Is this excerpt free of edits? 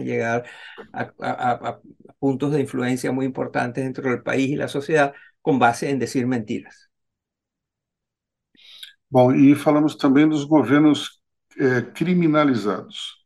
yes; 0 cuts

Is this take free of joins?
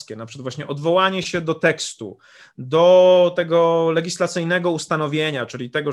yes; 0 cuts

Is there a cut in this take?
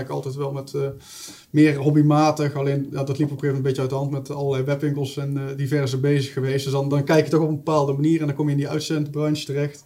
no; 0 cuts

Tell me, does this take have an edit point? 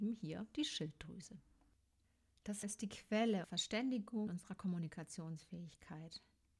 yes; 3 cuts; at 2.6 s, 3.4 s, 4.3 s

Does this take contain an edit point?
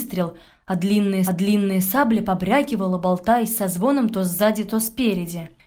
yes; 1 cut; at 1.3 s

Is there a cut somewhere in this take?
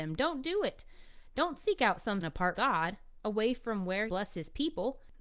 yes; 3 cuts; at 2.2 s, 2.6 s, 4.1 s

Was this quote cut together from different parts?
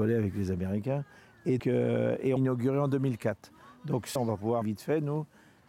yes; 4 cuts; at 1.6 s, 2.4 s, 4.2 s, 4.6 s

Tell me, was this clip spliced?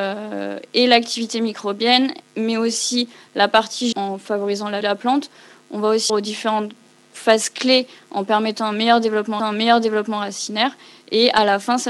yes; 4 cuts; at 3.9 s, 4.8 s, 6.1 s, 9.4 s

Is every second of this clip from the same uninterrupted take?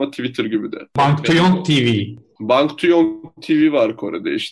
yes; 0 cuts

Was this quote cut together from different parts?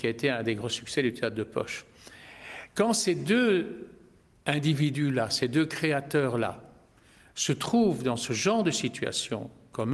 no; 0 cuts

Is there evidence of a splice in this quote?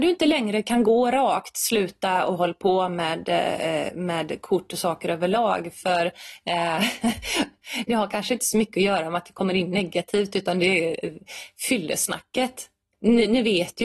no; 0 cuts

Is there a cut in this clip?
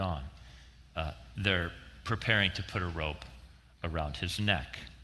no; 0 cuts

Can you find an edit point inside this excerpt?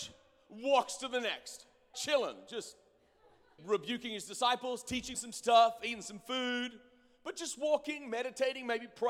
yes; 3 cuts; at 1.9 s, 3.6 s, 5.1 s

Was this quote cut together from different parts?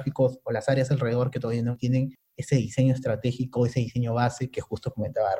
no; 0 cuts

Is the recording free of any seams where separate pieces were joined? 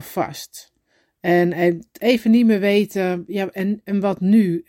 yes; 0 cuts

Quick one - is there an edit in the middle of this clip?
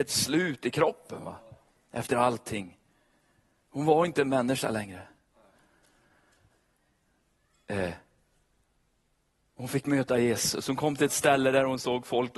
no; 0 cuts

